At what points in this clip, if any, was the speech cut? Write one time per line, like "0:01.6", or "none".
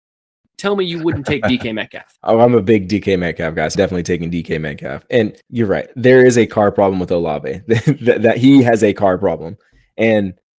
0:03.7
0:05.4